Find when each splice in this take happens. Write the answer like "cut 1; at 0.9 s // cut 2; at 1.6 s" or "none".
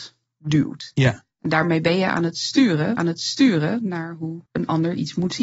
cut 1; at 3.0 s // cut 2; at 4.5 s